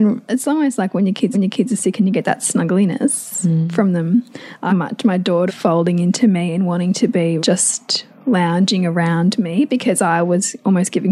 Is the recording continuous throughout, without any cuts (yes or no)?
no